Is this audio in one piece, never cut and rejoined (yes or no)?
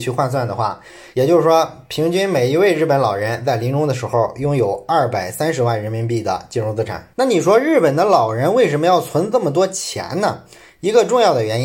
no